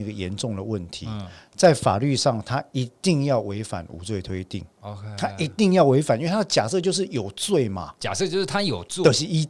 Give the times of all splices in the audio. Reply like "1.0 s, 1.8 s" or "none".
4.7 s, 8.0 s